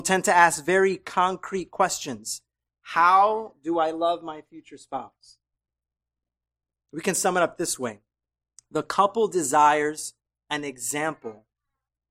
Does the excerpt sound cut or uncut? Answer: uncut